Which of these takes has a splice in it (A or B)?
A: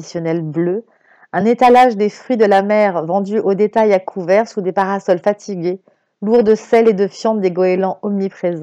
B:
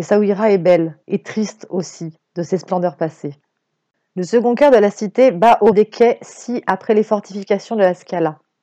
B